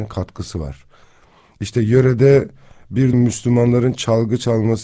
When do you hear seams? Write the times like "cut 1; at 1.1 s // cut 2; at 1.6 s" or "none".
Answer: cut 1; at 3.1 s